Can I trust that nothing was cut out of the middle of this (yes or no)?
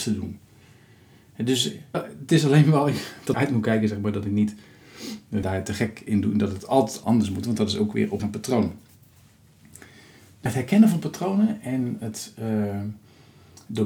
no